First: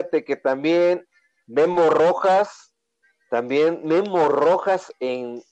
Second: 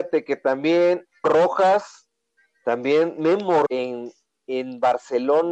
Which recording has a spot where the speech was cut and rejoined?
second; 2 cuts; at 1.2 s, 3.7 s

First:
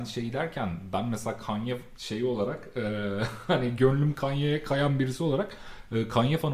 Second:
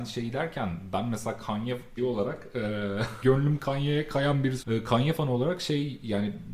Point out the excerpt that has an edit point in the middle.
second; 3 cuts; at 2.0 s, 3.2 s, 4.6 s

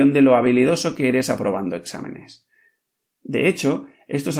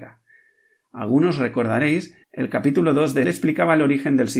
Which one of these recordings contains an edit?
second; 2 cuts; at 2.2 s, 3.2 s

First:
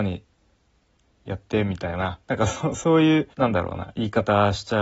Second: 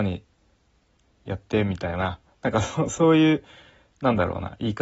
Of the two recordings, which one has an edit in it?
first; 2 cuts; at 2.2 s, 3.3 s

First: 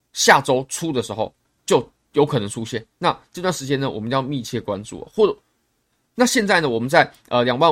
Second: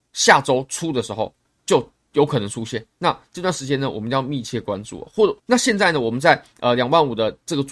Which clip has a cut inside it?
second; 1 cut; at 5.4 s

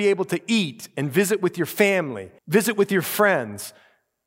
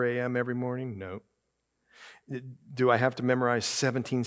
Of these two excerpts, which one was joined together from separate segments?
first; 1 cut; at 2.4 s

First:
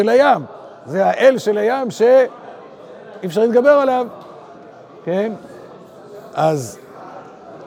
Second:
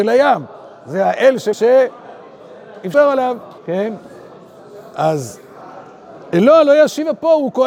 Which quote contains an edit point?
second; 3 cuts; at 1.5 s, 2.9 s, 3.6 s

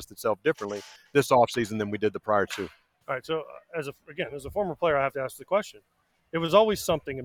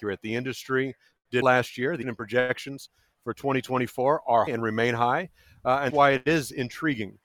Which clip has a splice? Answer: second; 4 cuts; at 1.4 s, 2.0 s, 4.5 s, 5.9 s

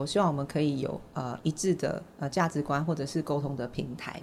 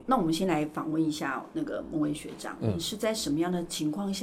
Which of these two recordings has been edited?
first; 1 cut; at 2.1 s

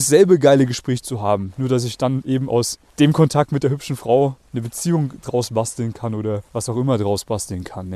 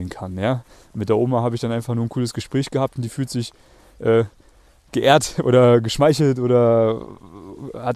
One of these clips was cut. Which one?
first; 2 cuts; at 2.9 s, 6.5 s

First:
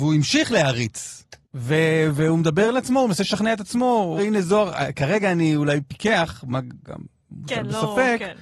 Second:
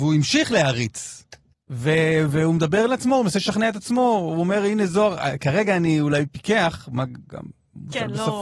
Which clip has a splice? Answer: first; 2 cuts; at 1.4 s, 4.2 s

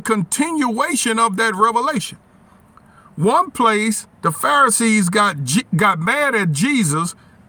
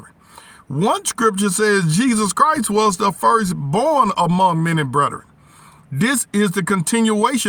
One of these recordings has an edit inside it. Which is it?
first; 1 cut; at 4.1 s

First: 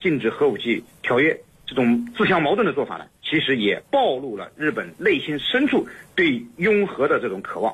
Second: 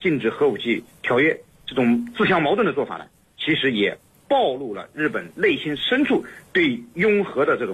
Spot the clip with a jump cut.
first; 2 cuts; at 3.1 s, 3.9 s

